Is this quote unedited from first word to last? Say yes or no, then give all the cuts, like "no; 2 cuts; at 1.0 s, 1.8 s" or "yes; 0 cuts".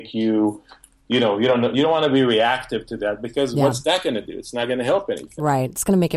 yes; 0 cuts